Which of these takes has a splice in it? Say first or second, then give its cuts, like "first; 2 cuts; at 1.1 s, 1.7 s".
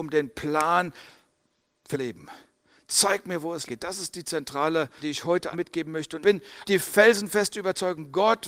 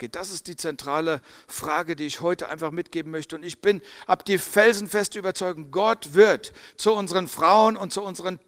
first; 6 cuts; at 1.9 s, 3.7 s, 5.0 s, 5.5 s, 6.2 s, 6.7 s